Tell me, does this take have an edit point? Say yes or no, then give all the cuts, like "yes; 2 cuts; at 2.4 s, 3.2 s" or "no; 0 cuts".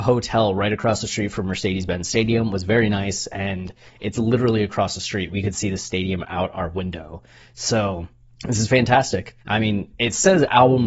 yes; 2 cuts; at 8.3 s, 9.4 s